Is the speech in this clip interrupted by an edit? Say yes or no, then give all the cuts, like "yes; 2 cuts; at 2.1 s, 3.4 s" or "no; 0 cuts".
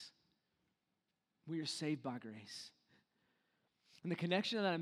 no; 0 cuts